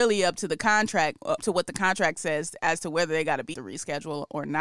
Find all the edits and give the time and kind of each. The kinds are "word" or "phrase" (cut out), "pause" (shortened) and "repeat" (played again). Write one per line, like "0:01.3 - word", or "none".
0:01.4 - word
0:03.5 - word